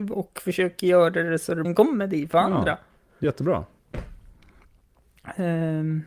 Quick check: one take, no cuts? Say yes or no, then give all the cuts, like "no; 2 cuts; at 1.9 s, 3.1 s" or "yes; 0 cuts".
no; 2 cuts; at 1.6 s, 3.2 s